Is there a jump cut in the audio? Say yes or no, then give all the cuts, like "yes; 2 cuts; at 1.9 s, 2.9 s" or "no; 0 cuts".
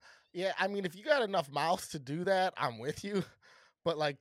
no; 0 cuts